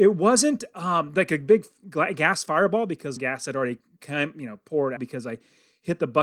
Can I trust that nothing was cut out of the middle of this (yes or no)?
no